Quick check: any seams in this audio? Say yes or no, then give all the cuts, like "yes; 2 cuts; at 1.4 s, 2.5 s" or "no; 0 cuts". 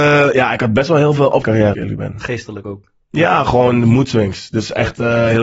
yes; 2 cuts; at 1.4 s, 1.7 s